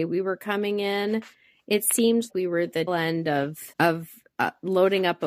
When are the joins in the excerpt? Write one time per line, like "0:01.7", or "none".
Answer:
0:02.3
0:02.9
0:03.7